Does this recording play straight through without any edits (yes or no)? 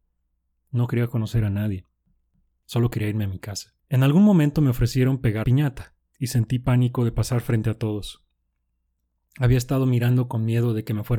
no